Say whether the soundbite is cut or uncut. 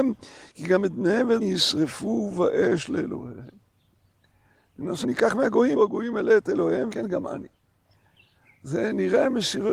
cut